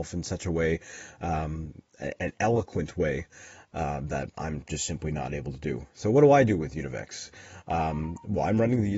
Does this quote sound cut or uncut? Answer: uncut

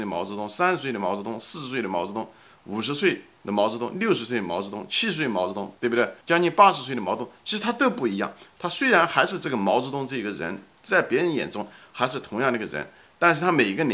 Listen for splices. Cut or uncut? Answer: cut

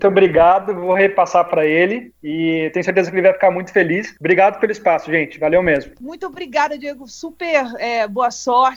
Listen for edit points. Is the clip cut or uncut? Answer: uncut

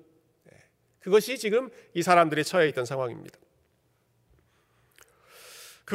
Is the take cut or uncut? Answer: uncut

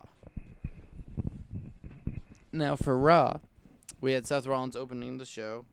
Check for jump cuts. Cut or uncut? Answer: uncut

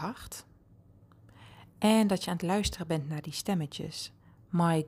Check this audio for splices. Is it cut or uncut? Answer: uncut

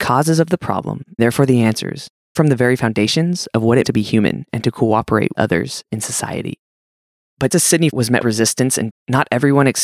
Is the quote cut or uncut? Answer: cut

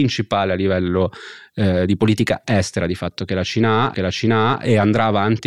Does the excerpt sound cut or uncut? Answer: cut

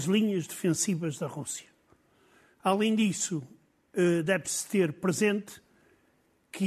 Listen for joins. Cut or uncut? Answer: uncut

